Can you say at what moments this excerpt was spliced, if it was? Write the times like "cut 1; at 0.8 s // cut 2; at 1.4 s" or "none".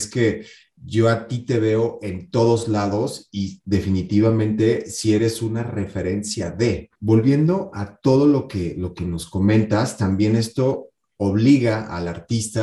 cut 1; at 7.0 s